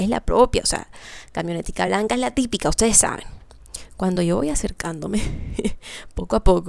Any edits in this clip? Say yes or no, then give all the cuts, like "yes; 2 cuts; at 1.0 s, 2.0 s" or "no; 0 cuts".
no; 0 cuts